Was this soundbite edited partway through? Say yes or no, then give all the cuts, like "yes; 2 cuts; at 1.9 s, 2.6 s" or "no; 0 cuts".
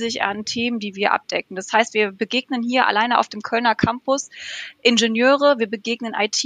no; 0 cuts